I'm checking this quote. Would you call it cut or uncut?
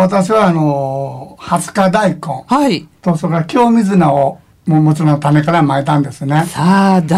uncut